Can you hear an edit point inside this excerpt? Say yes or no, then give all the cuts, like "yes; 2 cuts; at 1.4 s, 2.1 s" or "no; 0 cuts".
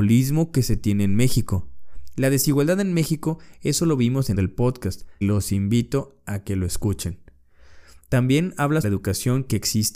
yes; 3 cuts; at 4.3 s, 5.2 s, 8.8 s